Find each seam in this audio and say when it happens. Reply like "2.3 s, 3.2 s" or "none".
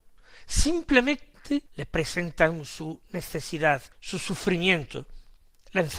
1.7 s, 3.9 s